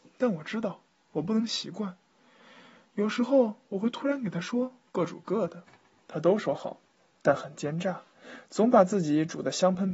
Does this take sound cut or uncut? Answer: uncut